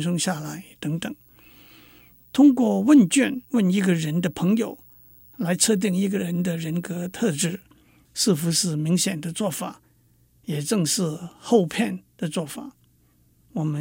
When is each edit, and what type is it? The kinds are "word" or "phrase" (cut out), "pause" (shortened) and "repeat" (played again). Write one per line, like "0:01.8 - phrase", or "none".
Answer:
0:03.4 - pause